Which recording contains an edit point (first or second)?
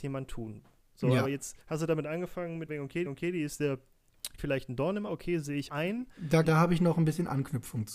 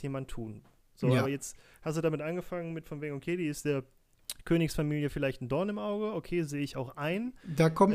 first